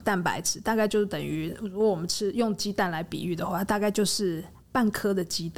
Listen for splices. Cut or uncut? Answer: uncut